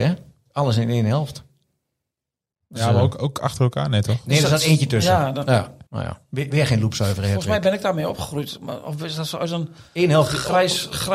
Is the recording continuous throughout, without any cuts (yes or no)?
no